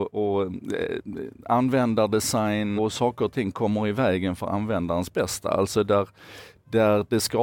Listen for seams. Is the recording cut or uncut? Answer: cut